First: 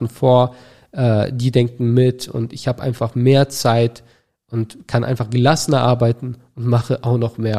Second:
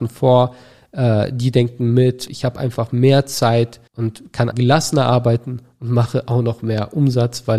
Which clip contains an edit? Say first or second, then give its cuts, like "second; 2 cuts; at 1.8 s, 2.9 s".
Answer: second; 3 cuts; at 2.3 s, 3.9 s, 4.5 s